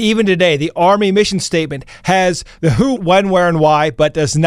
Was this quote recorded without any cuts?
no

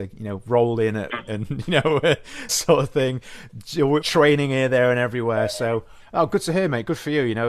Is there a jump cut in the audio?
yes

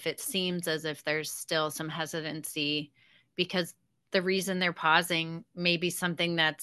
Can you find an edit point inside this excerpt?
no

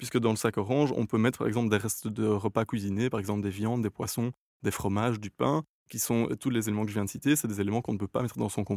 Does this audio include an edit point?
no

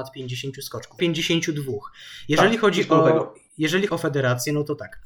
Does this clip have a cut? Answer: yes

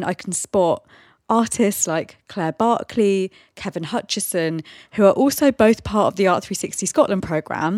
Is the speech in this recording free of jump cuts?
yes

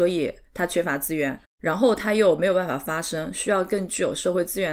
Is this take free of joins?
no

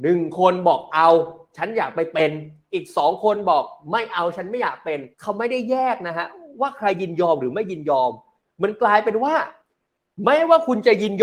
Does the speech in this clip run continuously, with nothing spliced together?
no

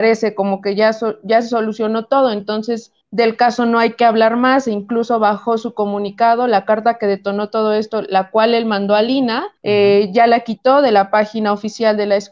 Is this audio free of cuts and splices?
no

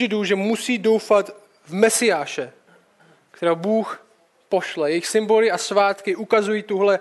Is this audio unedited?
yes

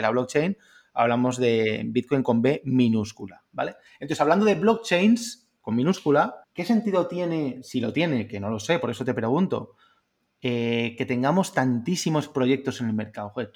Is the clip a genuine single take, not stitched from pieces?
no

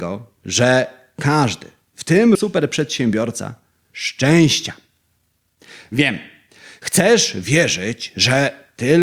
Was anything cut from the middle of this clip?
yes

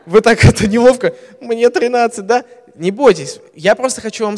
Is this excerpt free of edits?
no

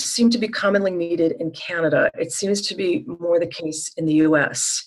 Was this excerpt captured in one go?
yes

